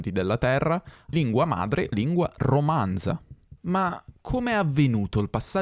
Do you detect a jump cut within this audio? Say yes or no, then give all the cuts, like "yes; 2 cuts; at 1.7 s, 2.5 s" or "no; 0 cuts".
yes; 3 cuts; at 1.1 s, 1.9 s, 3.6 s